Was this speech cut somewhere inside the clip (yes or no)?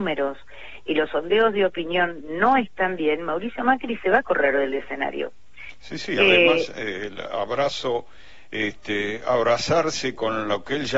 no